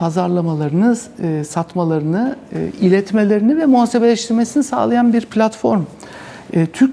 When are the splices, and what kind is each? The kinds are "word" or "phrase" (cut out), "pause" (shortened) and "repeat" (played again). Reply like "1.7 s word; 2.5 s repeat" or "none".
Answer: none